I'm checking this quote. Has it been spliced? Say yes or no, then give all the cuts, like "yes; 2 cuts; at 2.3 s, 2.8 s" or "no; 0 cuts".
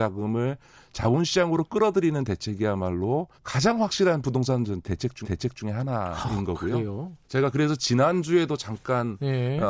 yes; 3 cuts; at 3.4 s, 5.2 s, 7.2 s